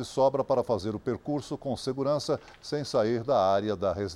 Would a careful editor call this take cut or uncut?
uncut